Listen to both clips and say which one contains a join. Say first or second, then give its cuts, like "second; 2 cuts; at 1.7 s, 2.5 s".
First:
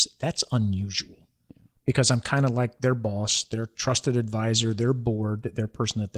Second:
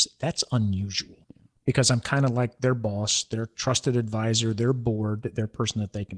second; 1 cut; at 1.2 s